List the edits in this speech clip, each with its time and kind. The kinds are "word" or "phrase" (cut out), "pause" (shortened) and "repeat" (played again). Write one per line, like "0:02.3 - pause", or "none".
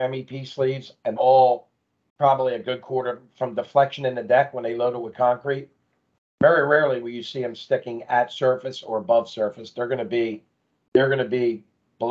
0:01.2 - word